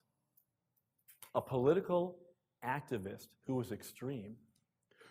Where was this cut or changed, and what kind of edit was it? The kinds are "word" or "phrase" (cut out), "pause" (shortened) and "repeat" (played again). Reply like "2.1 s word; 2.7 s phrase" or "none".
none